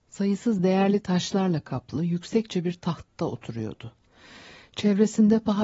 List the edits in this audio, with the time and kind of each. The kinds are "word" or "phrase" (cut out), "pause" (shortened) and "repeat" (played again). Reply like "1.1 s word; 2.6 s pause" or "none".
none